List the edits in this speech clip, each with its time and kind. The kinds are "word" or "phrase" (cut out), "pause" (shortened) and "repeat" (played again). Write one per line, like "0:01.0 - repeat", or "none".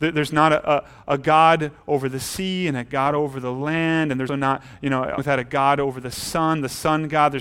0:04.3 - word
0:05.2 - word